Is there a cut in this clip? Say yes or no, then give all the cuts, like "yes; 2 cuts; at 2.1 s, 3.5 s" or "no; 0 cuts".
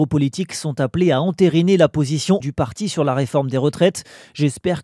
yes; 1 cut; at 2.4 s